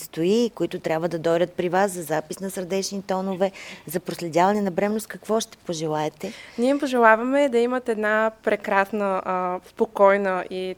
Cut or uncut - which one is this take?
uncut